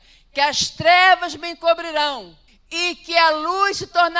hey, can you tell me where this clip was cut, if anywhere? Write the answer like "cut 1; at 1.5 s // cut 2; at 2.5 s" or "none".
cut 1; at 2.5 s